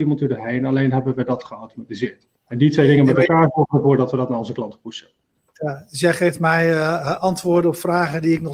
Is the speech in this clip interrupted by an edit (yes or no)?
yes